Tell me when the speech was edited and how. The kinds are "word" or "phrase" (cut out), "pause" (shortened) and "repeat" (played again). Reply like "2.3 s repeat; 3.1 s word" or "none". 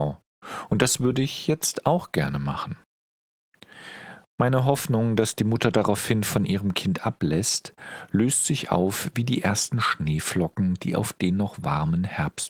none